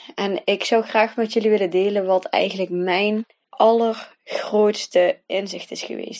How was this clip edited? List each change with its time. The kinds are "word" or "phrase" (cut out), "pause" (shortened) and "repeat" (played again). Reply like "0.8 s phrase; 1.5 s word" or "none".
3.4 s pause